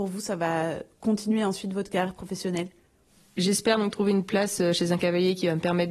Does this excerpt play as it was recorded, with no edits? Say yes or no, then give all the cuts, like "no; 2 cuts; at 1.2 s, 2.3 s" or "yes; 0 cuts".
yes; 0 cuts